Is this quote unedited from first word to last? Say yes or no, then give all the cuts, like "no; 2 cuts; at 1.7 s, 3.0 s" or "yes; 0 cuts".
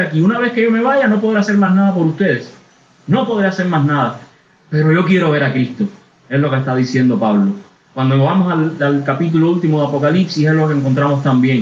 yes; 0 cuts